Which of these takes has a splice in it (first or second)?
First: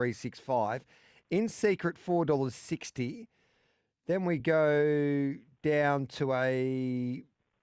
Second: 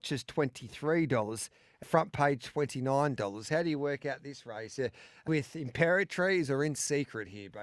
second